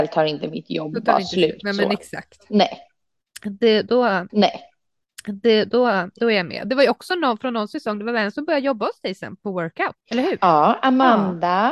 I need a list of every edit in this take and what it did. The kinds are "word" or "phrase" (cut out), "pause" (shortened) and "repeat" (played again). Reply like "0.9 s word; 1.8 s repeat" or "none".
4.3 s repeat; 10.0 s pause